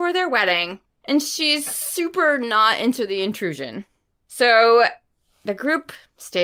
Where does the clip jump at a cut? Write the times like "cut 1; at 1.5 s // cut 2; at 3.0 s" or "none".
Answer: none